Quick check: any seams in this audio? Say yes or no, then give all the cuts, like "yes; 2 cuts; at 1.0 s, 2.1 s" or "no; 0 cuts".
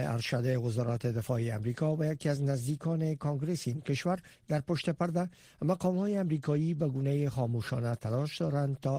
no; 0 cuts